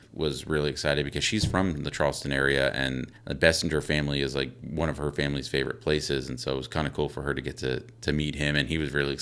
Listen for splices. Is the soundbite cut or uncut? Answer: cut